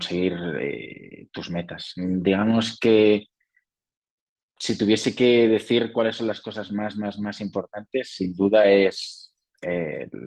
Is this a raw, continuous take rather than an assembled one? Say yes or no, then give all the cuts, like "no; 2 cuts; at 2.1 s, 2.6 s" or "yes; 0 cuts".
yes; 0 cuts